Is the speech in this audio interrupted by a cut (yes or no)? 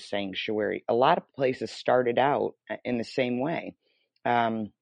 no